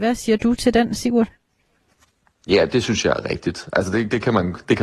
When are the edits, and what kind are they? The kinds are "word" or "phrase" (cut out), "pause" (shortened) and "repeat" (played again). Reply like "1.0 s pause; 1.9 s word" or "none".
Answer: none